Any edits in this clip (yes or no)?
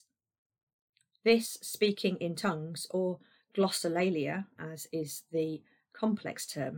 no